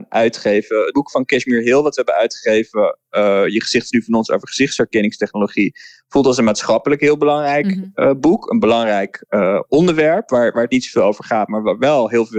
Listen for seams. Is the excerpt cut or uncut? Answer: uncut